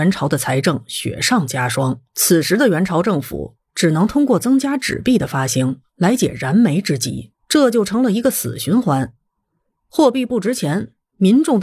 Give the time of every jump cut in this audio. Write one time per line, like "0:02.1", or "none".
0:02.1
0:07.4